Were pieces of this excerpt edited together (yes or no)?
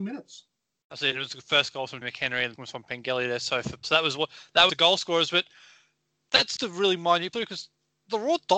yes